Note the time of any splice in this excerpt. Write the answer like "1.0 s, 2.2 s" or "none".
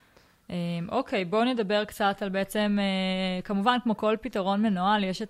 none